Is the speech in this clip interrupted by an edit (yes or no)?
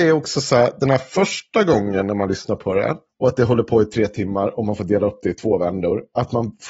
yes